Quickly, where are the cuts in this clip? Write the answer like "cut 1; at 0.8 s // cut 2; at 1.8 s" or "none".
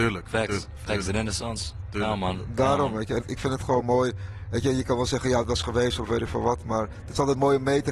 cut 1; at 3.2 s